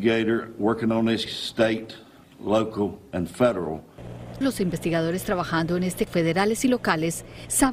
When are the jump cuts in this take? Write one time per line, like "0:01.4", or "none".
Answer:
0:01.3
0:04.4
0:06.1